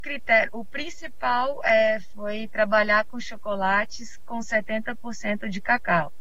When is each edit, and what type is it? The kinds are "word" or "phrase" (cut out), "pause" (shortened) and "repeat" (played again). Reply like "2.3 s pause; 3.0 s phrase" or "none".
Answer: none